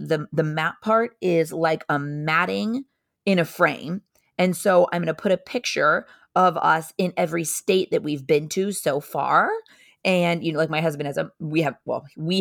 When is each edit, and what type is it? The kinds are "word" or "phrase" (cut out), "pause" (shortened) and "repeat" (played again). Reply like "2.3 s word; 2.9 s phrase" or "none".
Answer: none